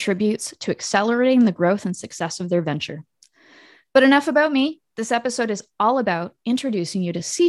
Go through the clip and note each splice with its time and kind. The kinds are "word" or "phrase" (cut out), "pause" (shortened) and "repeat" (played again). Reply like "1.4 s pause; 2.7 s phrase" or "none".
none